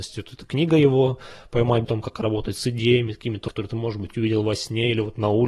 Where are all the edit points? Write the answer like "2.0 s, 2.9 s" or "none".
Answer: 1.8 s, 3.5 s